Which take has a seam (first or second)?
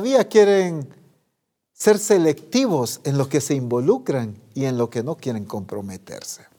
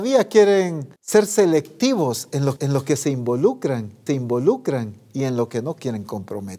second